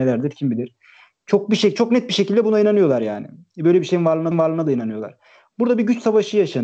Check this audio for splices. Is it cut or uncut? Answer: cut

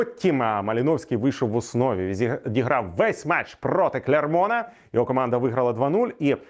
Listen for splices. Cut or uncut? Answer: uncut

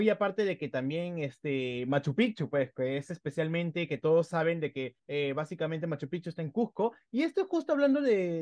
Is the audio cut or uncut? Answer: cut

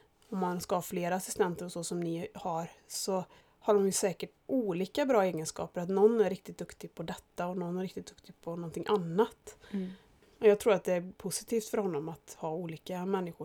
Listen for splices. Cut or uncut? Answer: uncut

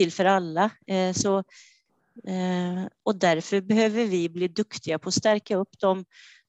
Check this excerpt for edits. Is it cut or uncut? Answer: uncut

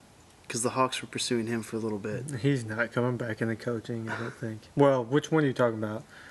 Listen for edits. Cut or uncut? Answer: cut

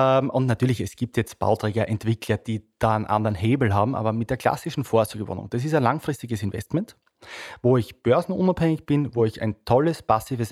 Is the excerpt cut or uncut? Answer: uncut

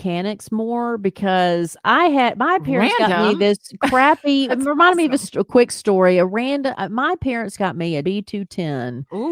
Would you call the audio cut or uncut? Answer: cut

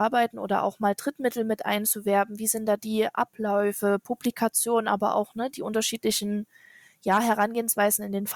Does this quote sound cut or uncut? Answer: uncut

